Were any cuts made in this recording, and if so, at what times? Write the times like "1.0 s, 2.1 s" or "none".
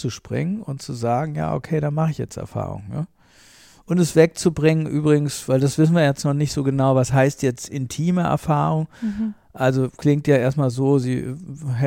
none